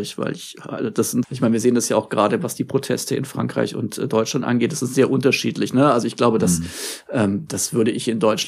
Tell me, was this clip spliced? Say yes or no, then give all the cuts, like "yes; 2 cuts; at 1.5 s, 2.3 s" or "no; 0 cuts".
yes; 1 cut; at 1.2 s